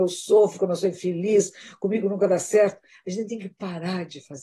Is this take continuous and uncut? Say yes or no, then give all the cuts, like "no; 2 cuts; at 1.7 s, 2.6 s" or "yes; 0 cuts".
yes; 0 cuts